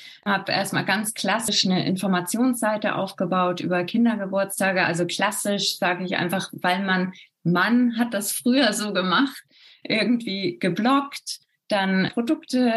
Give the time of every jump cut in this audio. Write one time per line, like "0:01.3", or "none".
none